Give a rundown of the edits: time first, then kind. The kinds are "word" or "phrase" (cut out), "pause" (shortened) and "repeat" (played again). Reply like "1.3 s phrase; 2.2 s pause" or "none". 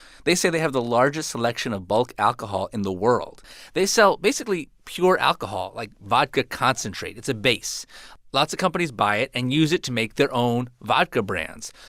none

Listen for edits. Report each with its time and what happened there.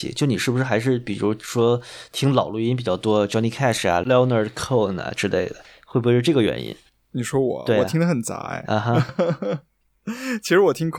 9.1 s word

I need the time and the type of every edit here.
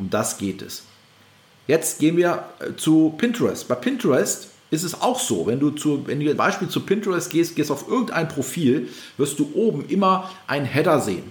6.4 s phrase

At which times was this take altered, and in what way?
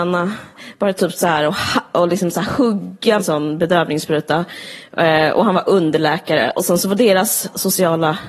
3.2 s word

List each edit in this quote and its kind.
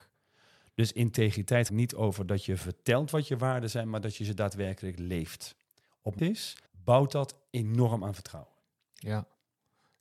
1.7 s word; 6.2 s phrase; 6.7 s pause

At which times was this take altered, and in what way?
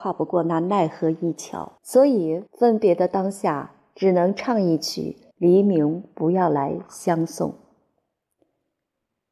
1.8 s pause; 2.5 s pause; 5.3 s pause

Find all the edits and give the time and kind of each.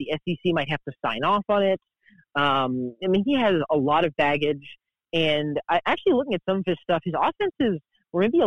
none

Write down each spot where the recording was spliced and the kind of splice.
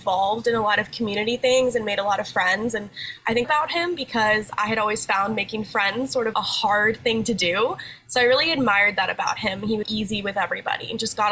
3.4 s phrase; 6.3 s word; 9.8 s word

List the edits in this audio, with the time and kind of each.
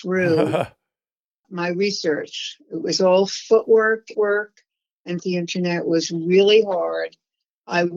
1.4 s word; 4.1 s phrase; 5.2 s phrase

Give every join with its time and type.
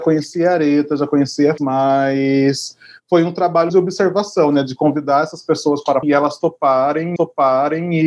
1.6 s word; 3.7 s word; 6.0 s word; 7.2 s repeat

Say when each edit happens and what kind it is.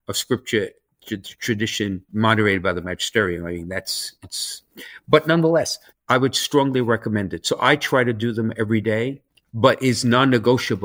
2.1 s pause; 5.9 s pause; 9.3 s pause

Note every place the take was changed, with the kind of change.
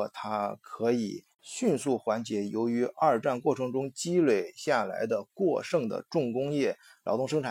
1.3 s pause

